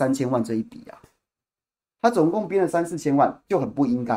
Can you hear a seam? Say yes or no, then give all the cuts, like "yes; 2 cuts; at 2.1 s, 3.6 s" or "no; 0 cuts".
no; 0 cuts